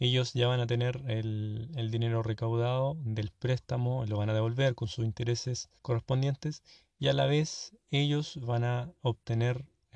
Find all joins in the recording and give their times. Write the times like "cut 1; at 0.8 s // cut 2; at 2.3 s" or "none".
cut 1; at 5.8 s